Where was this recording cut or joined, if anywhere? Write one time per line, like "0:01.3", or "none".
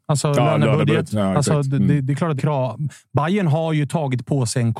0:02.4